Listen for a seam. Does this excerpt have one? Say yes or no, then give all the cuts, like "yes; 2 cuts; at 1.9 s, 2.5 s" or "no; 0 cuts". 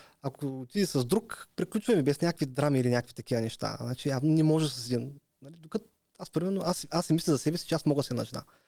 no; 0 cuts